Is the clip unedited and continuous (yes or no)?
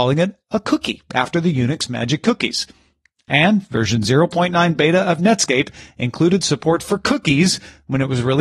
yes